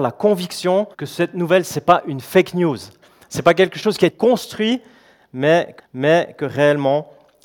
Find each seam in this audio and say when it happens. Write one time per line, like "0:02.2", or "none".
0:00.9
0:04.1
0:05.8